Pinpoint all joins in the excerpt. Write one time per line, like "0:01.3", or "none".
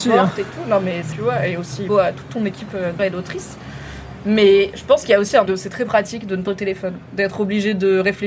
0:01.1
0:01.9
0:03.0
0:05.5
0:06.5